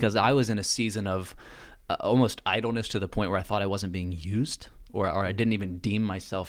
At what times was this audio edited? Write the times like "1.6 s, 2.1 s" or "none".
none